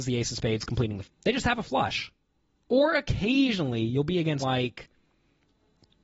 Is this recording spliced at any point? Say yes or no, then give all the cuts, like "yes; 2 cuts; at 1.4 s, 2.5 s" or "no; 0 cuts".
yes; 2 cuts; at 1.0 s, 4.4 s